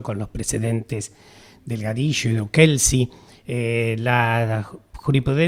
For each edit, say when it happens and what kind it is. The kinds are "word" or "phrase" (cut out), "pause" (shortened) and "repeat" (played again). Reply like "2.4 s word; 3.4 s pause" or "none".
none